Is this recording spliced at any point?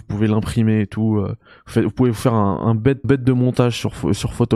yes; 1 cut; at 3.0 s

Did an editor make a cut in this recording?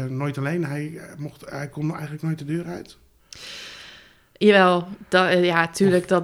no; 0 cuts

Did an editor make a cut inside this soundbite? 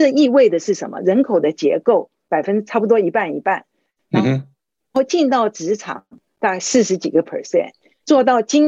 no; 0 cuts

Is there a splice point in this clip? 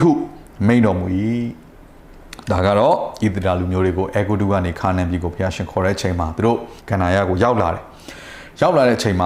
yes; 1 cut; at 6.8 s

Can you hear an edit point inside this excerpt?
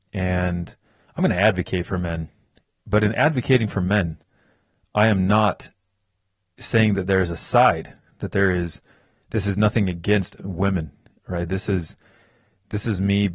no; 0 cuts

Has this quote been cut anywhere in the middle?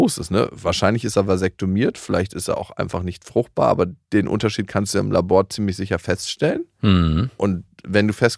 no; 0 cuts

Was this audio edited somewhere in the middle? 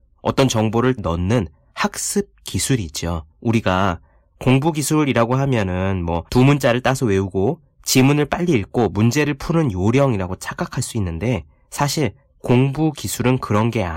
yes; 3 cuts; at 1.0 s, 3.3 s, 6.3 s

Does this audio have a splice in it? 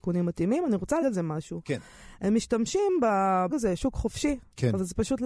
yes; 2 cuts; at 1.0 s, 3.5 s

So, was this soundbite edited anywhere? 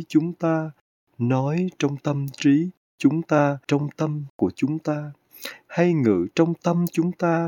yes; 1 cut; at 3.6 s

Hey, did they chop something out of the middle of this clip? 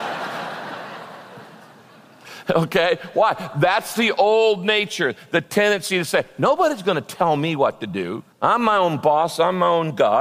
yes; 1 cut; at 8.3 s

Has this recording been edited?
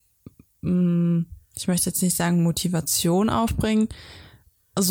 no; 0 cuts

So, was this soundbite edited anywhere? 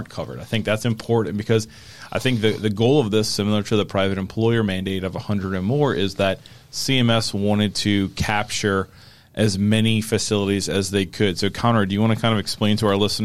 no; 0 cuts

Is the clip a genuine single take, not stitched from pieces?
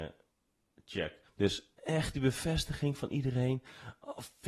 no; 1 cut; at 1.3 s

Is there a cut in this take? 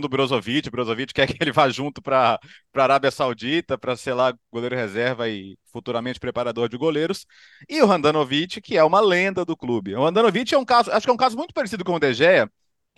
no; 0 cuts

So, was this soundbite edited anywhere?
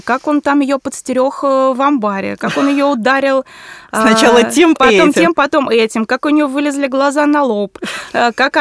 yes; 1 cut; at 4.8 s

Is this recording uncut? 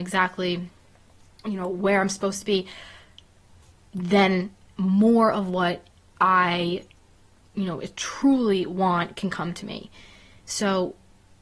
yes; 0 cuts

